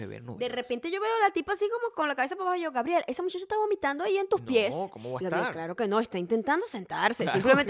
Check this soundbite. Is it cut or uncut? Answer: uncut